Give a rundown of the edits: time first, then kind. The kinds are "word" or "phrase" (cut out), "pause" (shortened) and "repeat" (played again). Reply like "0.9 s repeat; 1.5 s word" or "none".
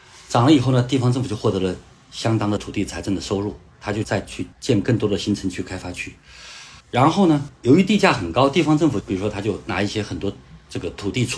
4.5 s pause; 6.8 s pause

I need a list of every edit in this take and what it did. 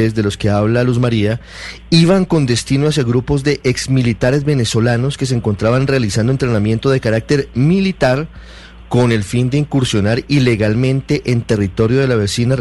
none

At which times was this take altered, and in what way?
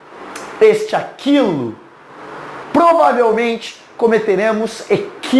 2.6 s word

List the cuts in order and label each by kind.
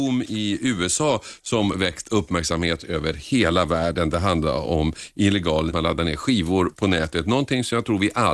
5.7 s phrase

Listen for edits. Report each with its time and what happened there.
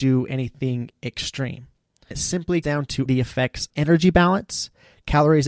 2.1 s word; 2.6 s word; 3.1 s word; 3.7 s word

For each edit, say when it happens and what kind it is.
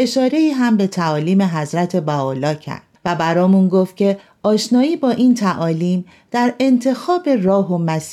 none

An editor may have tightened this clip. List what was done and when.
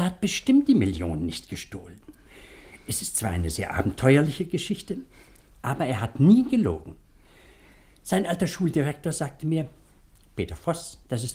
none

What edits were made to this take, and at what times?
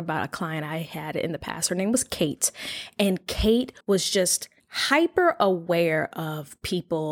3.8 s pause; 4.6 s pause

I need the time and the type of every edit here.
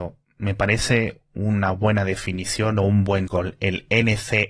3.3 s word

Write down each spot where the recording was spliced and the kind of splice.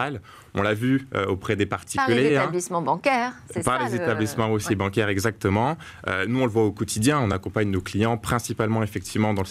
none

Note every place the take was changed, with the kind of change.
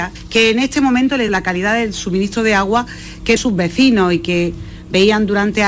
1.3 s word; 3.4 s word

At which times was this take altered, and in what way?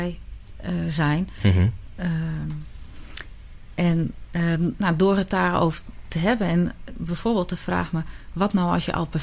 none

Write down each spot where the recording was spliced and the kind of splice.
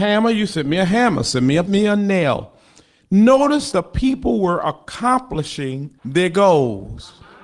1.7 s phrase; 3.7 s word; 6.0 s pause

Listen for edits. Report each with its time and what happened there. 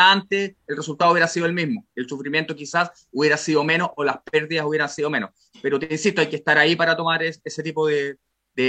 none

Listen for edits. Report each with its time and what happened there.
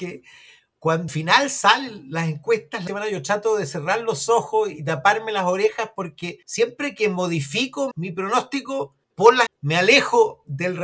1.1 s word; 2.9 s word; 6.4 s pause; 7.9 s word; 9.0 s pause; 9.5 s word

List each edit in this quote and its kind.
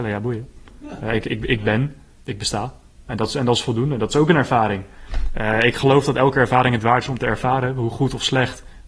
none

